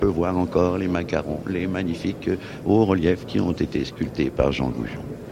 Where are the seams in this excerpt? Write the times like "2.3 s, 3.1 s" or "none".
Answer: none